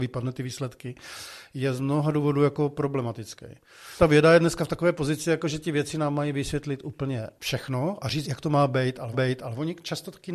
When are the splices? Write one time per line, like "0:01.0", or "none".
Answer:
0:08.2
0:09.1